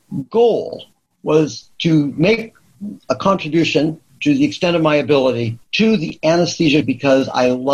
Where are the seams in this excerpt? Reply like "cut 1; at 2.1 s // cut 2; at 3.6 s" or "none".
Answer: cut 1; at 1.1 s // cut 2; at 5.6 s // cut 3; at 6.8 s

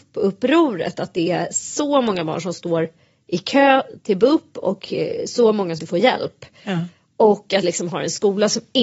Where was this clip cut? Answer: cut 1; at 5.8 s // cut 2; at 7.6 s

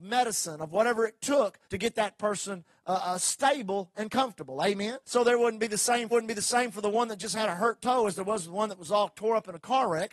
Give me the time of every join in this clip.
cut 1; at 1.6 s // cut 2; at 5.0 s // cut 3; at 6.1 s

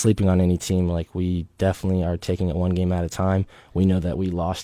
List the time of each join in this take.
none

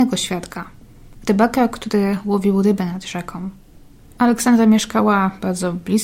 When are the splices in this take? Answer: none

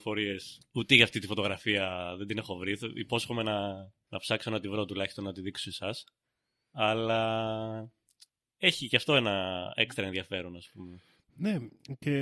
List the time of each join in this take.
none

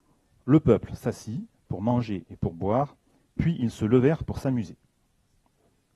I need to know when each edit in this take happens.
none

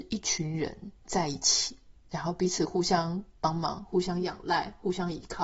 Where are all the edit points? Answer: cut 1; at 1.0 s // cut 2; at 2.0 s

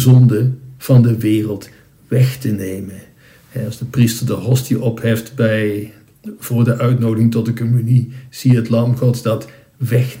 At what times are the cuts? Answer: none

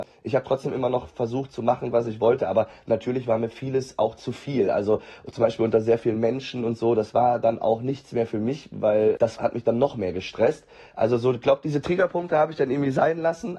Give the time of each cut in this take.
none

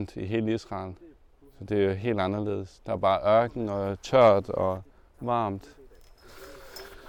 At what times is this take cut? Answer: none

